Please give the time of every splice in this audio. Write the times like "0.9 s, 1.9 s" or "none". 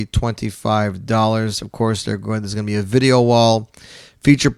none